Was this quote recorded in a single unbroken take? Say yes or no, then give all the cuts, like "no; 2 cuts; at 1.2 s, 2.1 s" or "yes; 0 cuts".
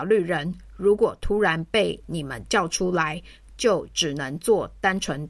yes; 0 cuts